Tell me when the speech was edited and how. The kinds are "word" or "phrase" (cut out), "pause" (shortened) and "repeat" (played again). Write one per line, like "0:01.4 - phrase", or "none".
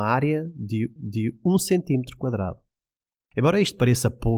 0:01.0 - repeat

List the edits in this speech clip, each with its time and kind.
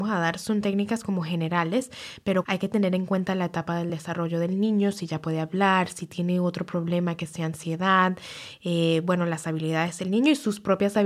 none

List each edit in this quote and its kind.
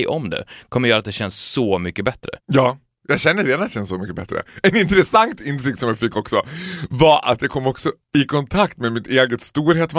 0:02.4 - pause
0:08.0 - pause

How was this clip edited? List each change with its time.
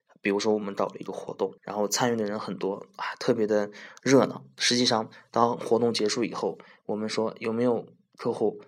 0:01.6 - pause

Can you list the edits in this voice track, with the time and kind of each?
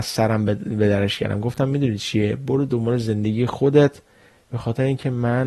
none

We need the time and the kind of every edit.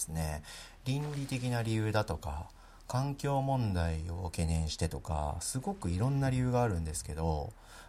none

